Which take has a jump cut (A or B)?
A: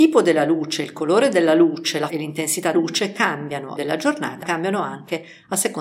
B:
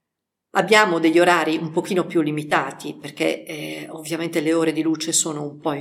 A